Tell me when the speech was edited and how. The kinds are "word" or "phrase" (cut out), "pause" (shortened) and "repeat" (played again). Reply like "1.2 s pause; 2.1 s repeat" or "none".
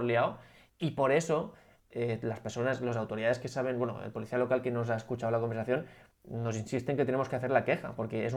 none